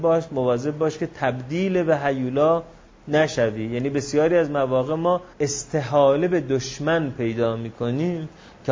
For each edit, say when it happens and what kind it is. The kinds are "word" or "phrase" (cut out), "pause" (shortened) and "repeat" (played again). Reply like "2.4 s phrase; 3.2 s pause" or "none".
5.3 s pause

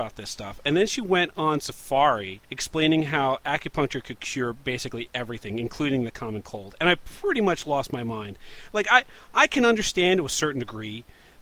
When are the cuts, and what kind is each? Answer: 2.4 s pause

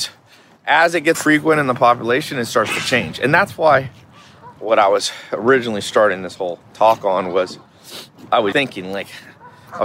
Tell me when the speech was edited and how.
1.1 s word; 4.6 s pause; 8.5 s word

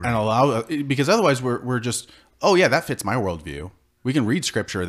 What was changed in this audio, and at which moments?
none

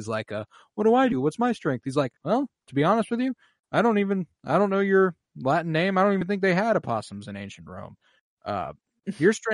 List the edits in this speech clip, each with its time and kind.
2.2 s pause

